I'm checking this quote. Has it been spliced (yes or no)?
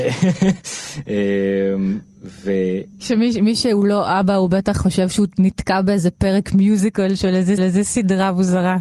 yes